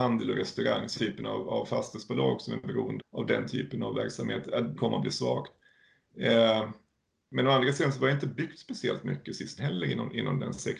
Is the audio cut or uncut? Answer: cut